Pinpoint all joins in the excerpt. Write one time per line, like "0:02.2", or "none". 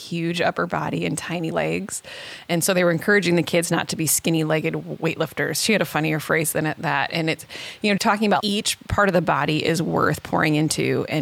0:01.5
0:08.0
0:08.4